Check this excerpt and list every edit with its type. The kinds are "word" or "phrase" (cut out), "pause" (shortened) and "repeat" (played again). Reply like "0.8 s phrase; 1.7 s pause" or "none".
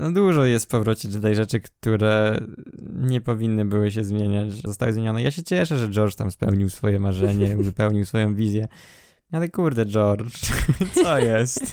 4.7 s word